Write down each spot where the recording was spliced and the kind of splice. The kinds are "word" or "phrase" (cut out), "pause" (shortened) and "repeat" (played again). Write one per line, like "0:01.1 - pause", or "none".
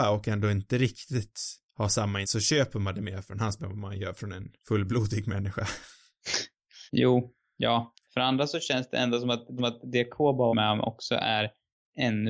0:01.7 - pause
0:02.2 - word
0:03.6 - word
0:04.6 - pause
0:06.9 - pause
0:08.0 - pause
0:09.6 - repeat
0:10.5 - word